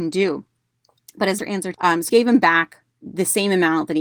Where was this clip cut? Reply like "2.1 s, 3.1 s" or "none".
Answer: 1.4 s, 1.7 s, 2.1 s, 2.9 s